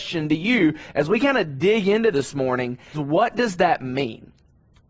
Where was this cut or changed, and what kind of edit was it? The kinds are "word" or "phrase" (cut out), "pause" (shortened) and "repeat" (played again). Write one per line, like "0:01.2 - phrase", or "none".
0:02.1 - word
0:02.9 - word